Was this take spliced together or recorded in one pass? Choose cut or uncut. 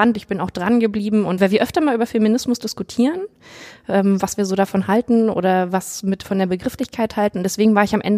cut